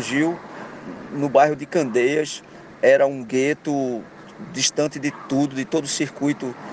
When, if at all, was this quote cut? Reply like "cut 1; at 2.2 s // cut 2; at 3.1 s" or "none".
none